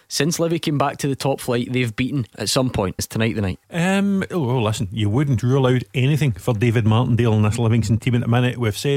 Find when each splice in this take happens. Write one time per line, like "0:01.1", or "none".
0:02.3
0:03.0
0:03.6